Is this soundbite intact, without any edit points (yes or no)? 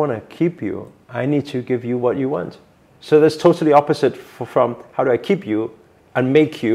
yes